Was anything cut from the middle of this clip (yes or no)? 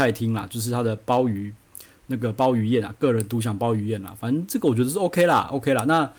no